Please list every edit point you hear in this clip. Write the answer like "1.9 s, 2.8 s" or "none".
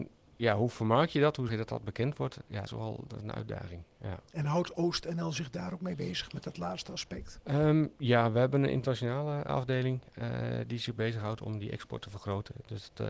1.5 s, 2.7 s, 4.3 s, 9.5 s